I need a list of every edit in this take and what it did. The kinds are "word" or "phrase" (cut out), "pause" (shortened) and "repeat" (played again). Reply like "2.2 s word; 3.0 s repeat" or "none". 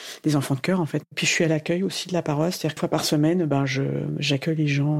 2.8 s word